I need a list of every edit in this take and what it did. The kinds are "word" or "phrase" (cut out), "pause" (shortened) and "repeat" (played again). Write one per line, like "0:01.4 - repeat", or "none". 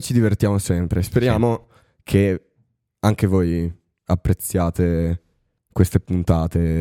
none

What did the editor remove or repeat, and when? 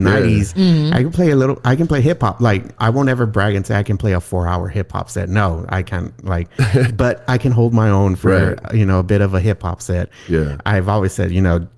0:02.8 - word
0:06.9 - word

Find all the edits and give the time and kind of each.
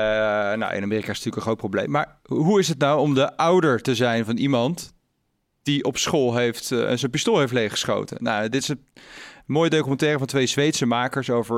none

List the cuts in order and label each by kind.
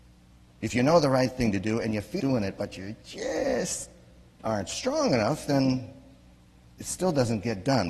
0:02.2 - word

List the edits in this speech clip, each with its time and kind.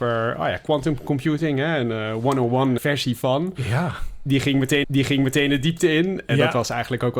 0:02.8 - word
0:04.8 - repeat

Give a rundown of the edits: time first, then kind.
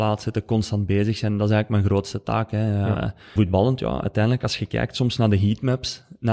0:03.4 - word

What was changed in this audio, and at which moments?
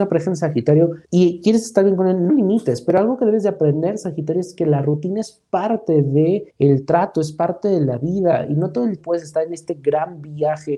0:01.0 - pause
0:02.3 - word
0:06.5 - pause
0:09.0 - word

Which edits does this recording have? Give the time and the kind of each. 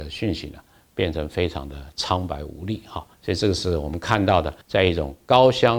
0:03.1 - pause
0:04.6 - pause

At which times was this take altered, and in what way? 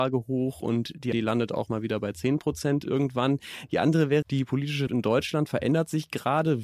0:01.1 - word
0:04.2 - word
0:04.9 - word

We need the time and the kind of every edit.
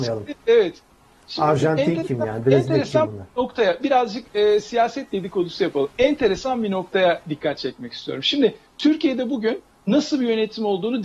none

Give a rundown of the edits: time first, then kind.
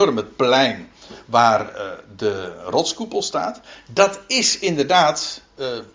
none

